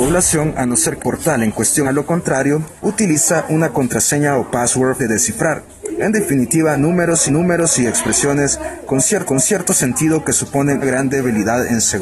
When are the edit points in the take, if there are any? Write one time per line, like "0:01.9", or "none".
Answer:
0:01.0
0:01.8
0:02.8
0:05.0
0:07.3
0:09.3
0:10.8